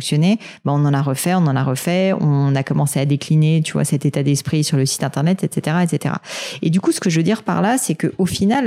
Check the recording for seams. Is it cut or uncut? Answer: uncut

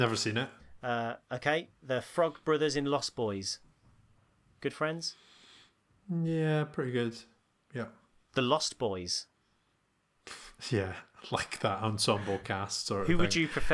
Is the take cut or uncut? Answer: uncut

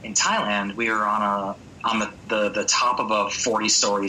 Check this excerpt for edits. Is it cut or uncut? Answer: uncut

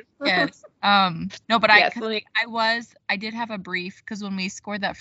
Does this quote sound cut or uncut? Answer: cut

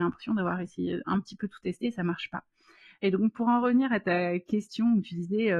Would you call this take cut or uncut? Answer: uncut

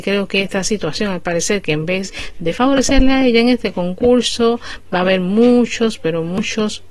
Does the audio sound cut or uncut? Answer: uncut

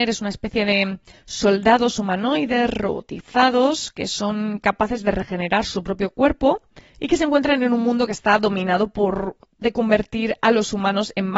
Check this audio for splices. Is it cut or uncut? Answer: cut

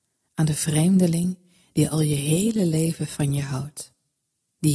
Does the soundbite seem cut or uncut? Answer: uncut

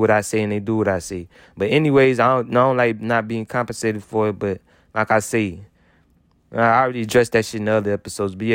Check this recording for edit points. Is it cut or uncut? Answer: uncut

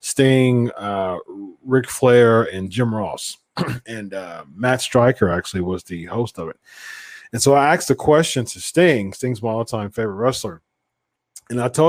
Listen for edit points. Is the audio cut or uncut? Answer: uncut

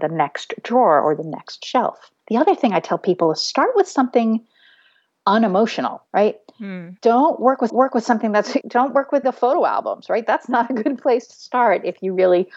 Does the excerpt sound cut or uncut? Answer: cut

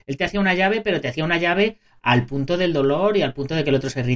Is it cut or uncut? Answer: uncut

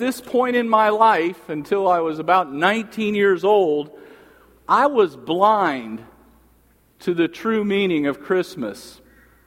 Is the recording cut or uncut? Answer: uncut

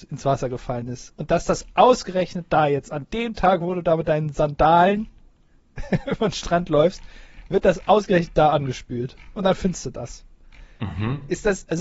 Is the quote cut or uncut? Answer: uncut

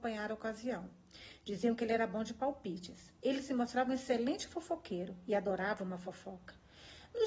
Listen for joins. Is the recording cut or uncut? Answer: cut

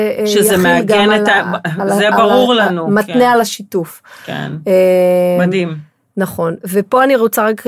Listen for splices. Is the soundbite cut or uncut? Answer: uncut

